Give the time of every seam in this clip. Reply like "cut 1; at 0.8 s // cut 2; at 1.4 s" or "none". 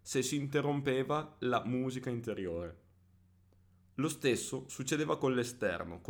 none